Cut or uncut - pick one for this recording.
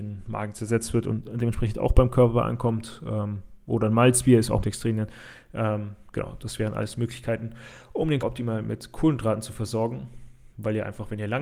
cut